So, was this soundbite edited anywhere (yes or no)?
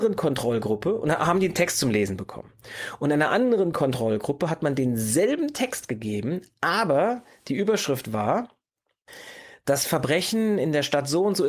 no